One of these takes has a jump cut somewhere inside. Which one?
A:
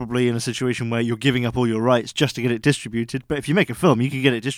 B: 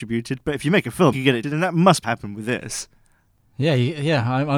B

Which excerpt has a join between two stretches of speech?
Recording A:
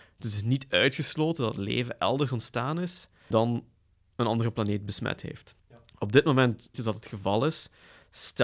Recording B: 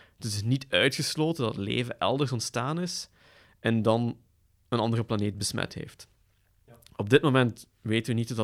A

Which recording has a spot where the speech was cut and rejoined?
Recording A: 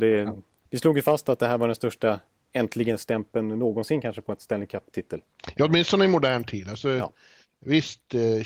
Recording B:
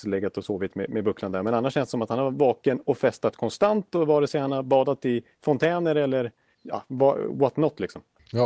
B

